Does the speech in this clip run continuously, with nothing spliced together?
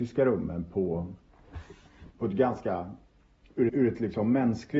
no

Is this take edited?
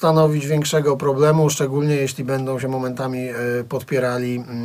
no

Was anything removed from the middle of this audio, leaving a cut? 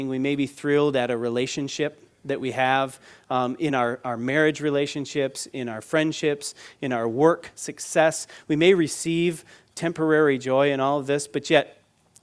no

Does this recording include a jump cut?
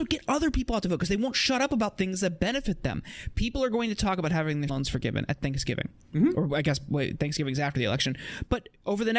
yes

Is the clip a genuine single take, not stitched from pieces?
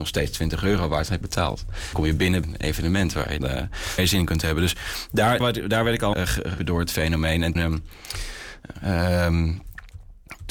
no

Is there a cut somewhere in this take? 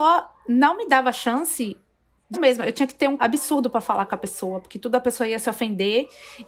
yes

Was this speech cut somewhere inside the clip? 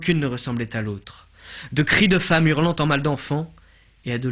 no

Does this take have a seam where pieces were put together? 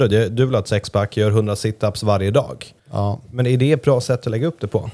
yes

